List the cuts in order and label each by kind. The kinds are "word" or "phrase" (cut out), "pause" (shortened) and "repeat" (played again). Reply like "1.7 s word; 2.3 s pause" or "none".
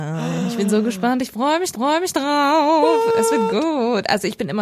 1.7 s repeat